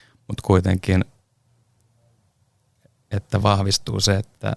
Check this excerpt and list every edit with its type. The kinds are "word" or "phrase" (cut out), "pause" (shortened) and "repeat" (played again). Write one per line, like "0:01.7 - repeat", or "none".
none